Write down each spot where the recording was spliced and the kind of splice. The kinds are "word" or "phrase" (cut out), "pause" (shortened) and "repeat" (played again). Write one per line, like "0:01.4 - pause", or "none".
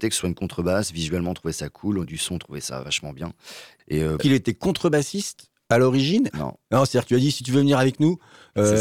0:02.0 - word
0:02.8 - word
0:04.2 - word
0:07.1 - word